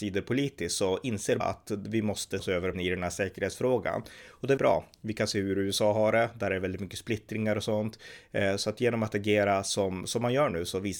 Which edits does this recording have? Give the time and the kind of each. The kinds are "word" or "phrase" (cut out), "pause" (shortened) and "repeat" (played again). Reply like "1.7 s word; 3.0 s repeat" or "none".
1.4 s word; 2.4 s word; 2.7 s word; 4.6 s word